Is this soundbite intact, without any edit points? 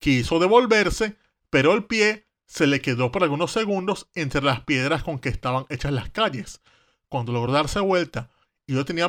yes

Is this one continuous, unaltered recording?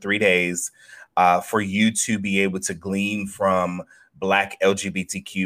yes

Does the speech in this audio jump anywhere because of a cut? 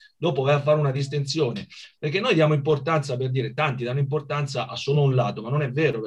no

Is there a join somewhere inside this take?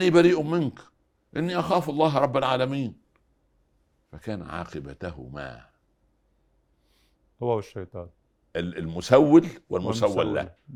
no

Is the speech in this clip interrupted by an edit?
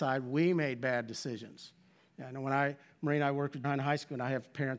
yes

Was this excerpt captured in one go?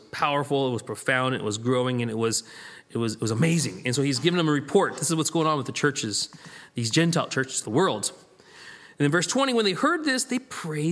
no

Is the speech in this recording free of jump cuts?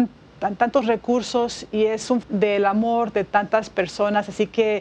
no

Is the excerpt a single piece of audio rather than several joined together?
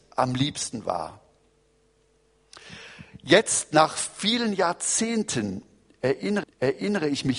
no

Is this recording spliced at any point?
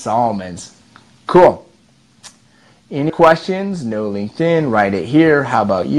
yes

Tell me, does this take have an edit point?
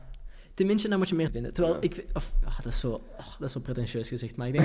yes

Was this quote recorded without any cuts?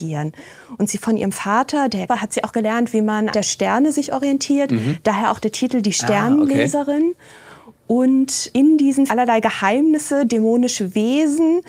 no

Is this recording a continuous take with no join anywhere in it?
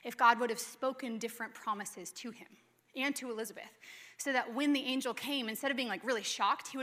yes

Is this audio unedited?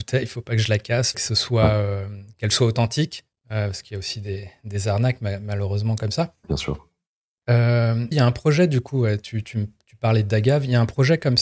no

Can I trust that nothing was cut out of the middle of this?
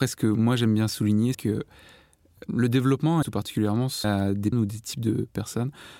no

